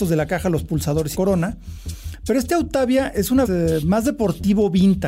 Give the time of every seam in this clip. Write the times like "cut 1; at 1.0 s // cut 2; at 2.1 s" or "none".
cut 1; at 1.1 s // cut 2; at 3.4 s